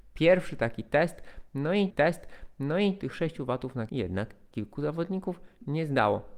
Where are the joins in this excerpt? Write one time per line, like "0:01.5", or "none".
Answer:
0:01.9
0:03.9